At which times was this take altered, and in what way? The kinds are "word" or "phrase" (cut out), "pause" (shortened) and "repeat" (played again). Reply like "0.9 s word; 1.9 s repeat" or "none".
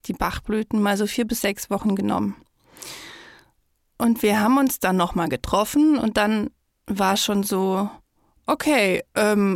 none

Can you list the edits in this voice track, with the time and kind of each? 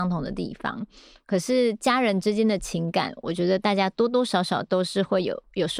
none

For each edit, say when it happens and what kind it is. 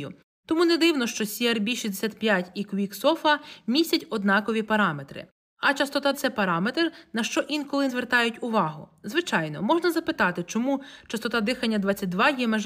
6.1 s word; 7.9 s word

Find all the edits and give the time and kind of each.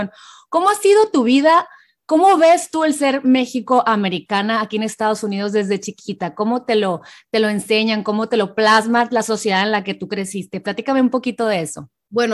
none

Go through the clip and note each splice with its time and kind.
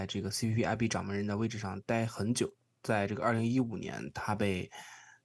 none

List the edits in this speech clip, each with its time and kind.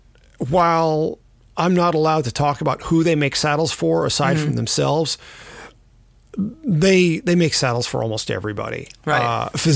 none

